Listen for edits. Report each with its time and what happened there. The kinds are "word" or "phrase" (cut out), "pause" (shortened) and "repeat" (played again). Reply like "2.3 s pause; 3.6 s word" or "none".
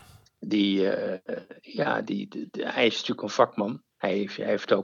3.9 s pause